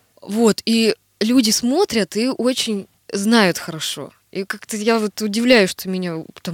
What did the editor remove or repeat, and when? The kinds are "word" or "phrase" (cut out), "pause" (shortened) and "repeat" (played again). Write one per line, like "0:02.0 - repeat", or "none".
none